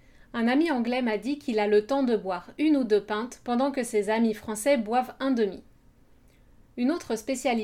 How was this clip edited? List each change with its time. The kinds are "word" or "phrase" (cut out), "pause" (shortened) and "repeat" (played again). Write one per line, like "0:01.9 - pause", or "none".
none